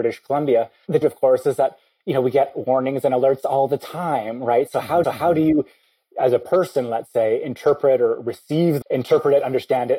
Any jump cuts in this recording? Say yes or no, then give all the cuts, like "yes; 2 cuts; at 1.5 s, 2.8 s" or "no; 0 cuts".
yes; 3 cuts; at 1.0 s, 5.0 s, 8.8 s